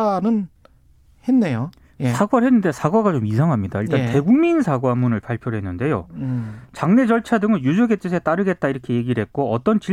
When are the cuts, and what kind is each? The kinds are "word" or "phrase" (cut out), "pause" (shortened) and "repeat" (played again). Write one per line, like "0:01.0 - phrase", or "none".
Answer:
none

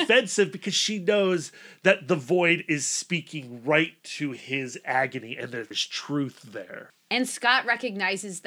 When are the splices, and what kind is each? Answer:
0:05.7 - word

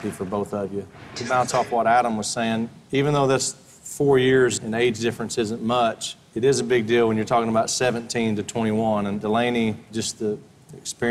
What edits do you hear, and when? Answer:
none

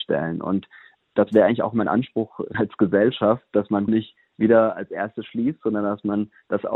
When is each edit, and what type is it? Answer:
0:01.0 - word
0:02.5 - word
0:03.9 - word

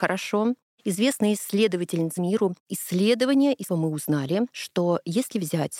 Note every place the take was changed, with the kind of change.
0:02.2 - phrase
0:03.7 - word

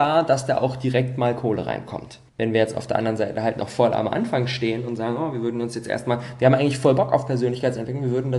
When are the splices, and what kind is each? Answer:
0:02.3 - pause

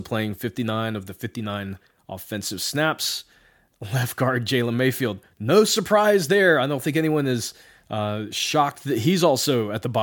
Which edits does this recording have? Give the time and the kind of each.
none

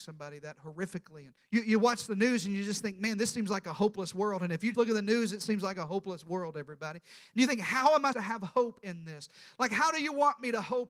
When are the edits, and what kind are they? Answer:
0:01.4 - pause
0:04.7 - word
0:08.1 - word

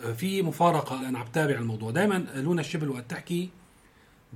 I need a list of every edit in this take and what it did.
0:01.0 - word

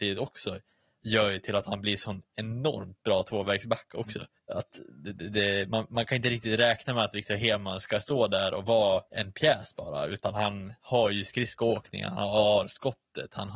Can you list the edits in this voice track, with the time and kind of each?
0:04.4 - pause
0:09.1 - pause

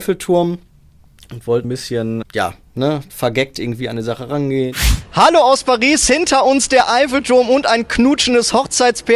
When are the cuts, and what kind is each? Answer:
0:01.6 - word
0:02.2 - word

